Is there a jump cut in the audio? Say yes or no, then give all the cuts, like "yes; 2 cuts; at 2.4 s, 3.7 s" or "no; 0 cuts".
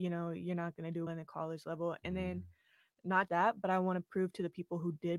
yes; 2 cuts; at 1.1 s, 3.3 s